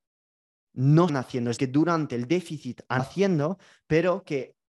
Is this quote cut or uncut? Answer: cut